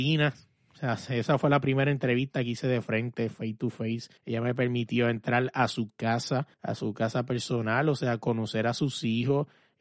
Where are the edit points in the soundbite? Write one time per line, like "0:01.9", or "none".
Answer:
0:04.2
0:06.5